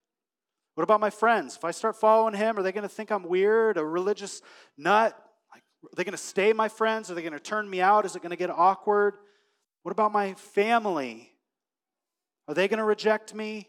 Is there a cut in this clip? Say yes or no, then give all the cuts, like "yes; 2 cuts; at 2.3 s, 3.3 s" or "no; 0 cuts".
no; 0 cuts